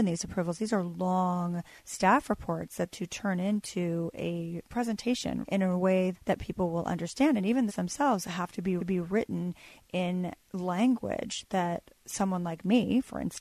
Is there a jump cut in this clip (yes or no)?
yes